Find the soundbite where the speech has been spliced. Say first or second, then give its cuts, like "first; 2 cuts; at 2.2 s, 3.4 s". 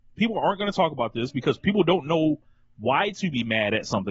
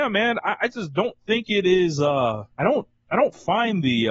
second; 1 cut; at 2.5 s